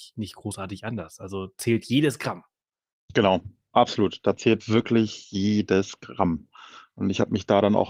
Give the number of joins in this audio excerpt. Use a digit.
3